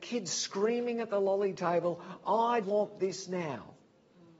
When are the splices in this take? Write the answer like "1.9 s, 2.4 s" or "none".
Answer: 2.6 s

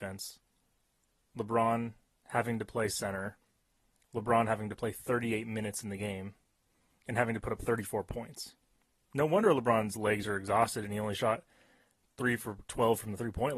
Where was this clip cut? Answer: none

